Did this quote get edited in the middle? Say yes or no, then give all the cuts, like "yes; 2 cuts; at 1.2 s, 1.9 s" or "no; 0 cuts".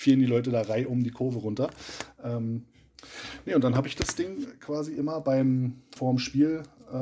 yes; 1 cut; at 6.0 s